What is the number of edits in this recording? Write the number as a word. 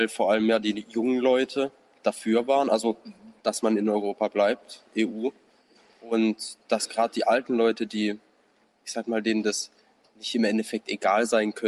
zero